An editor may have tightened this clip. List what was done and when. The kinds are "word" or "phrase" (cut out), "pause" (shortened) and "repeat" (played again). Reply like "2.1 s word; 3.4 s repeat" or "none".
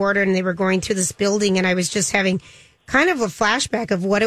none